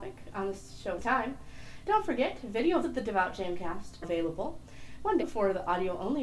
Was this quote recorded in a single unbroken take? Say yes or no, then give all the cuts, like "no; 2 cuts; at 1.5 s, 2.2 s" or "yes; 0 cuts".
no; 4 cuts; at 1.0 s, 2.8 s, 4.0 s, 5.2 s